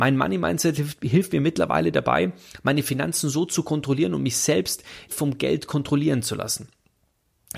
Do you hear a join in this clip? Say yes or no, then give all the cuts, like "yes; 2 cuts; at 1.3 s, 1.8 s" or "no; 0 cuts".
yes; 1 cut; at 5.1 s